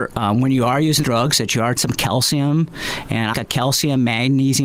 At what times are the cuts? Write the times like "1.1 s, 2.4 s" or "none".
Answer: 1.0 s, 1.8 s, 3.3 s